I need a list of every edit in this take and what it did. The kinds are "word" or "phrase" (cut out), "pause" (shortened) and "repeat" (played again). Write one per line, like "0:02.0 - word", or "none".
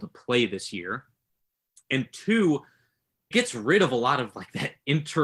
0:03.3 - word